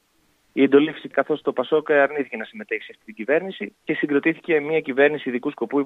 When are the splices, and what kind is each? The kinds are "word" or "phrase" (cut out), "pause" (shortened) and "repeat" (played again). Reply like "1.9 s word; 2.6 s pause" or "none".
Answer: 1.1 s word; 3.8 s pause